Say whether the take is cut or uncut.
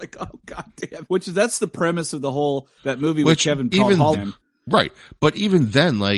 cut